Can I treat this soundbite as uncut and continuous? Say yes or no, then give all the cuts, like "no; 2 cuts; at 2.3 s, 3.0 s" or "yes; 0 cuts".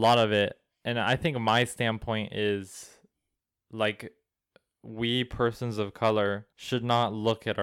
no; 2 cuts; at 3.4 s, 6.5 s